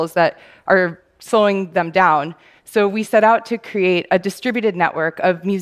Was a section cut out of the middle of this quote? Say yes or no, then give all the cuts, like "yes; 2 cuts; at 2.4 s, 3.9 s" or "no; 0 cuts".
no; 0 cuts